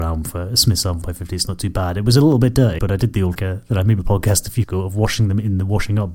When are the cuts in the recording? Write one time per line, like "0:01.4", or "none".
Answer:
0:01.0
0:02.8
0:03.4
0:04.0
0:04.6